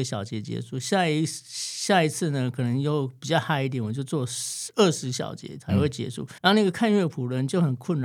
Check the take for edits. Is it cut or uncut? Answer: cut